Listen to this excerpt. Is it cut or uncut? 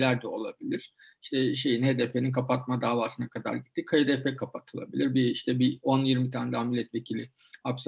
uncut